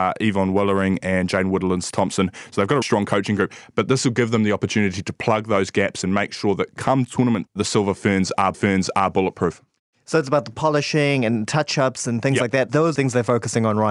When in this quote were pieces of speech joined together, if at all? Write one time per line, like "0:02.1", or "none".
0:02.8
0:07.5
0:08.5
0:12.9